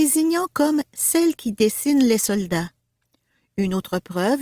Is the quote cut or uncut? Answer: uncut